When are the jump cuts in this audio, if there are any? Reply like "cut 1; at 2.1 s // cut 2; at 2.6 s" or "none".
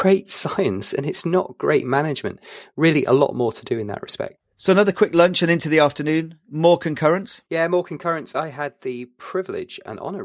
cut 1; at 7.5 s